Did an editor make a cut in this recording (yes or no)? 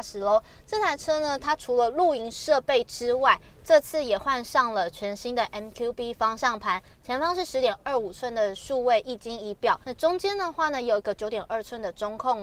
yes